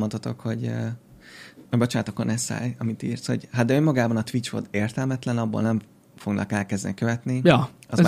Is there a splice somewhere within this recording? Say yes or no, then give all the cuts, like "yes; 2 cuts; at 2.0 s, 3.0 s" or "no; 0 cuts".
no; 0 cuts